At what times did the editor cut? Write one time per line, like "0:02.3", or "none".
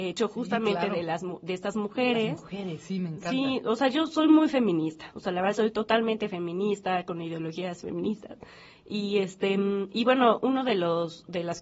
none